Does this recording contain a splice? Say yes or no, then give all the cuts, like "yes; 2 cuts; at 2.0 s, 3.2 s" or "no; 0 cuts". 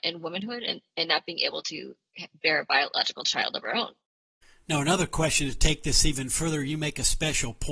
no; 0 cuts